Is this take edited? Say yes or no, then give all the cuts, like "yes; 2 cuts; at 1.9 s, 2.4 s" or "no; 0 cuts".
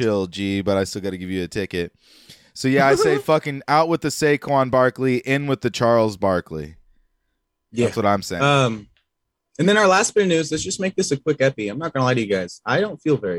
no; 0 cuts